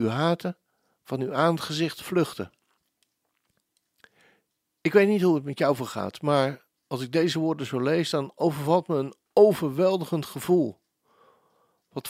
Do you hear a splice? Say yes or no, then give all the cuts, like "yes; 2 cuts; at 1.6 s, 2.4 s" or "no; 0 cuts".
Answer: no; 0 cuts